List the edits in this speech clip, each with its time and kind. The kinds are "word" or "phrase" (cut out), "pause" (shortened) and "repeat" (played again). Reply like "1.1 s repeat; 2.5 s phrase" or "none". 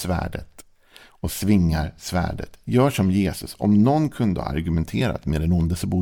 none